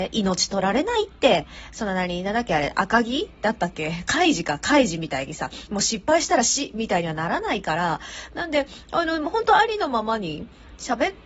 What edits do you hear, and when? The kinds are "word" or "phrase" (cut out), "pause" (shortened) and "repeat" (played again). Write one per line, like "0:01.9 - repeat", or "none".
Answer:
none